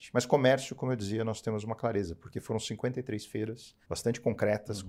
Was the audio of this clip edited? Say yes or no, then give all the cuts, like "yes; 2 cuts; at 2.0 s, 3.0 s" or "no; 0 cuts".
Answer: yes; 1 cut; at 3.8 s